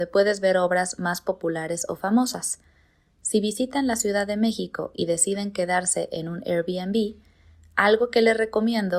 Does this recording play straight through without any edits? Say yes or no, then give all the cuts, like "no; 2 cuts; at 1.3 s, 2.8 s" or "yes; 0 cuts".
yes; 0 cuts